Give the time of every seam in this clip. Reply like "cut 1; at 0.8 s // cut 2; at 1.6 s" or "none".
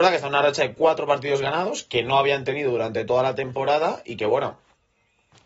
none